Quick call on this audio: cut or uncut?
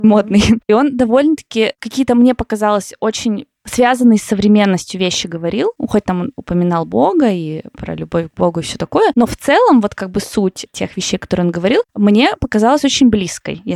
uncut